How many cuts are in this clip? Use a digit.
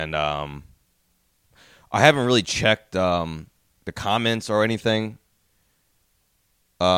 1